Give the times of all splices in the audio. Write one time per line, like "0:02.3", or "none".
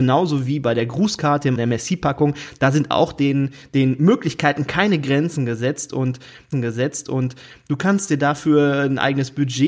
0:01.6
0:06.5

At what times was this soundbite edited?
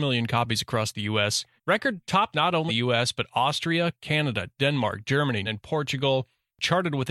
0:01.6
0:02.3
0:02.7
0:05.4

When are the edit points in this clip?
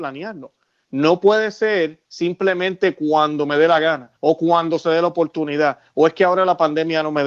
0:04.2

